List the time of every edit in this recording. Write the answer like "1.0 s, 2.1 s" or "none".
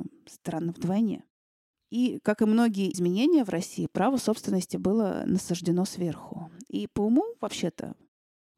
2.9 s